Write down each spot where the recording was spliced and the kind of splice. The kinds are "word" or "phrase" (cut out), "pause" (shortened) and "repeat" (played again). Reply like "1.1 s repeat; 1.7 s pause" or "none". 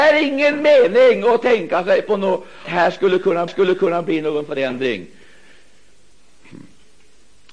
2.6 s word; 3.5 s repeat